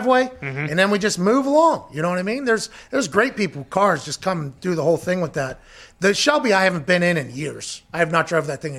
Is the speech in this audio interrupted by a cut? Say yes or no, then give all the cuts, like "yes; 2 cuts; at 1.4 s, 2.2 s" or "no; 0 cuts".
no; 0 cuts